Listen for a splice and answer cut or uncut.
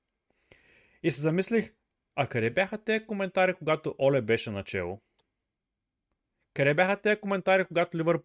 uncut